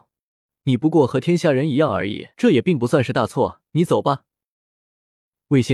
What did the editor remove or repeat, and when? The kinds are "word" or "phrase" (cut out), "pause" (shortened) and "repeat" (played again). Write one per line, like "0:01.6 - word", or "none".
0:02.3 - pause
0:03.7 - pause